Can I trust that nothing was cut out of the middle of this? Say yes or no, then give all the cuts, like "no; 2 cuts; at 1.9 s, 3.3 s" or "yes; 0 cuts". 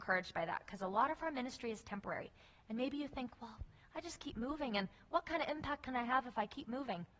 yes; 0 cuts